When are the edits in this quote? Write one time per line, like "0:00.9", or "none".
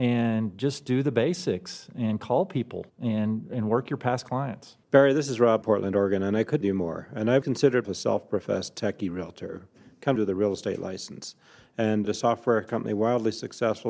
0:02.9
0:04.8
0:05.6
0:06.6
0:07.4
0:07.8
0:10.2
0:12.0